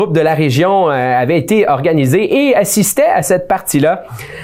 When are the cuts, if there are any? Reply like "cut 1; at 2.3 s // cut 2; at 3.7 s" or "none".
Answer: none